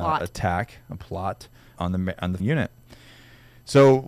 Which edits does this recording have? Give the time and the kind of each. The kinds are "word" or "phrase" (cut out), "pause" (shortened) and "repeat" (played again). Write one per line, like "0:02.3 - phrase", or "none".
0:01.8 - word
0:02.4 - word